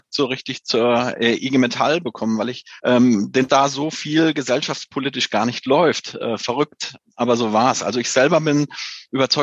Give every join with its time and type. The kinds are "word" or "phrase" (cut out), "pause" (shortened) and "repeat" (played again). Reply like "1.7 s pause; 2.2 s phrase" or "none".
2.8 s pause; 3.5 s phrase